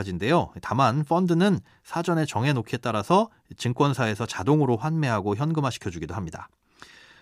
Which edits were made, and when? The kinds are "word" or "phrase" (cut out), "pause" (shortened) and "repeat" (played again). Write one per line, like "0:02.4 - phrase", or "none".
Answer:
none